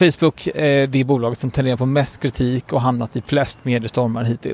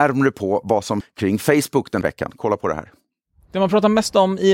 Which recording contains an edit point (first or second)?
second